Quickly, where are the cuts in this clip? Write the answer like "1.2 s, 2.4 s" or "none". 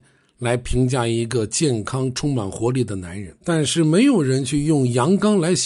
3.4 s

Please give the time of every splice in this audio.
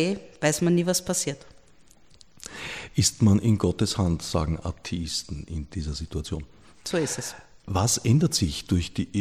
none

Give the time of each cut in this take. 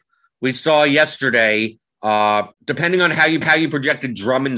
2.5 s, 3.4 s

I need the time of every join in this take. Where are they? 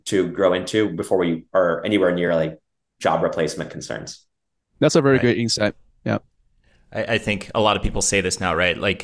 none

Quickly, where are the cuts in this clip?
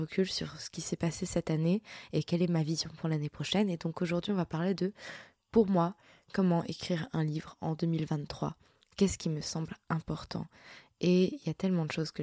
none

